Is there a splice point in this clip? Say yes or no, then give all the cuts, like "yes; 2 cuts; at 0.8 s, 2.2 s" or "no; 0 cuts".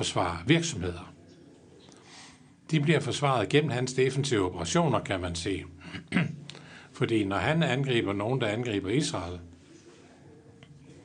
no; 0 cuts